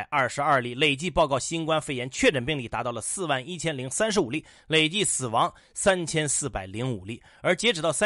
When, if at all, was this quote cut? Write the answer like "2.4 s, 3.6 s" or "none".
none